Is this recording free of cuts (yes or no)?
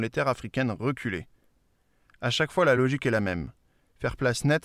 yes